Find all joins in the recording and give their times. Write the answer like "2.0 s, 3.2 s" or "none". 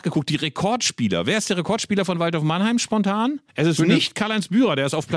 3.5 s